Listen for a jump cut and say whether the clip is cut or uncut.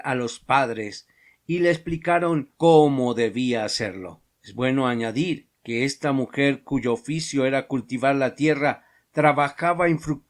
uncut